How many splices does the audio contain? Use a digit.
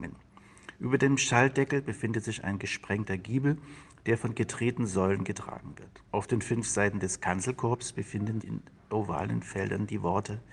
2